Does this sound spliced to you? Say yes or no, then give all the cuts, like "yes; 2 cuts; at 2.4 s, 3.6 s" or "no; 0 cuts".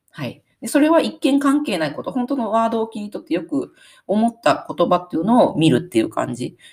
no; 0 cuts